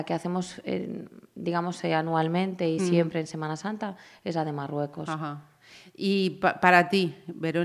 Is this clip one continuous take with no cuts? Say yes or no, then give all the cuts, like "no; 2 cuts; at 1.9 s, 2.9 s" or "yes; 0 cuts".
yes; 0 cuts